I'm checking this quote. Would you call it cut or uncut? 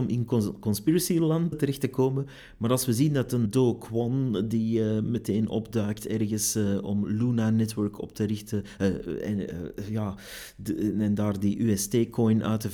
cut